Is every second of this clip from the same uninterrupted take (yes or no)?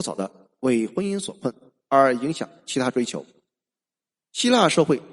yes